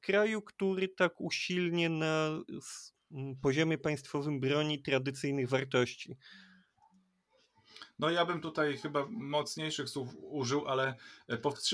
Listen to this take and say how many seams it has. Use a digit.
0